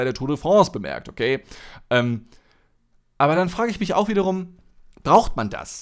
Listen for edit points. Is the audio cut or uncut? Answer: uncut